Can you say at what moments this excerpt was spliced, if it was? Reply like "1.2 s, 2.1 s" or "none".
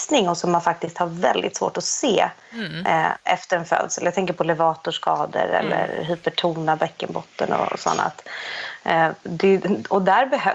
none